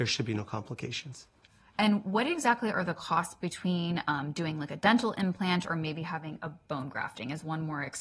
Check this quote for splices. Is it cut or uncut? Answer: uncut